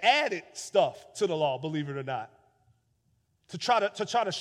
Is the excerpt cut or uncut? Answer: uncut